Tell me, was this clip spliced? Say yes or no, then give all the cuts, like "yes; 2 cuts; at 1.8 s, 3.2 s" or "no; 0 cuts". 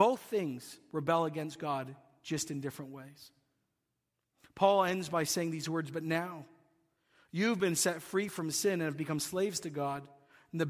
no; 0 cuts